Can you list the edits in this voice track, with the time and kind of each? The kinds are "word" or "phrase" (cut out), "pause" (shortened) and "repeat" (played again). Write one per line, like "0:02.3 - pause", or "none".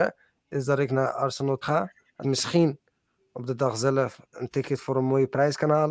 0:01.6 - phrase
0:02.2 - phrase